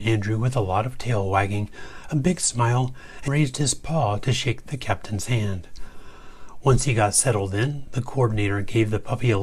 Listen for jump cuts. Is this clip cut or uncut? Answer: cut